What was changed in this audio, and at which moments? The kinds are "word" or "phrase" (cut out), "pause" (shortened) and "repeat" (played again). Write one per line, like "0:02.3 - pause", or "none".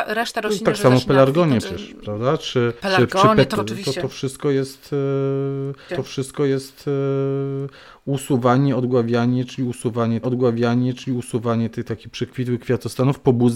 0:01.6 - word
0:02.8 - pause
0:03.6 - phrase
0:05.9 - repeat
0:10.2 - repeat